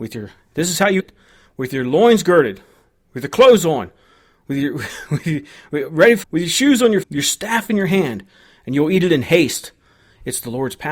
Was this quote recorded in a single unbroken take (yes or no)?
no